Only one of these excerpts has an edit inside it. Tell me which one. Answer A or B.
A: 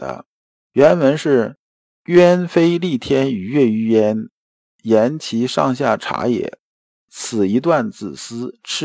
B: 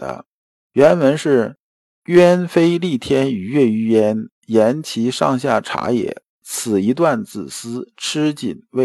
B